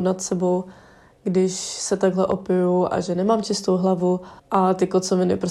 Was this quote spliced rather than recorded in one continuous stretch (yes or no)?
yes